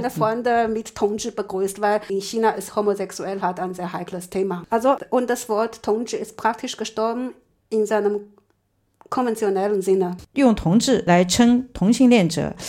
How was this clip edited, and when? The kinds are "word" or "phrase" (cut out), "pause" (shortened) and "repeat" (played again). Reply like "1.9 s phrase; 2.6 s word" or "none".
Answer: none